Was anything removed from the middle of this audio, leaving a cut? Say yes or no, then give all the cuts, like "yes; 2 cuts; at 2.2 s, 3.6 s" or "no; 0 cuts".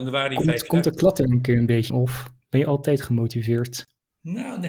yes; 1 cut; at 1.9 s